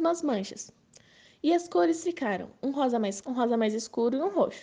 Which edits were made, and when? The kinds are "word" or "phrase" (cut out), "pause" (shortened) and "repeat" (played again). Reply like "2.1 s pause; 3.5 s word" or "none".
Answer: 3.2 s word